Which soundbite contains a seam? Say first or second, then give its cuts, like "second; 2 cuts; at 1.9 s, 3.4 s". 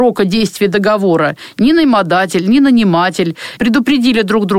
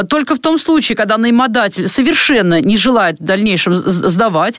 first; 1 cut; at 3.6 s